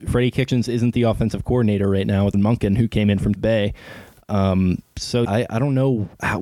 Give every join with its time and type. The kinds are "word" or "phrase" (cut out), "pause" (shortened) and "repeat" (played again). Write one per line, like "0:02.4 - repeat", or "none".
0:02.3 - word
0:03.4 - word
0:05.2 - word

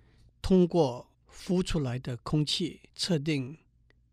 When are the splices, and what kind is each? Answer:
0:01.1 - pause
0:02.9 - pause

